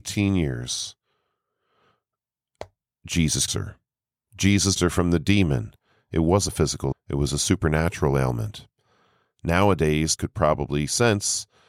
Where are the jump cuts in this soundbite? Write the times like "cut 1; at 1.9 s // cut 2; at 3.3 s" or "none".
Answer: cut 1; at 3.5 s // cut 2; at 4.8 s // cut 3; at 6.5 s // cut 4; at 6.9 s // cut 5; at 10.2 s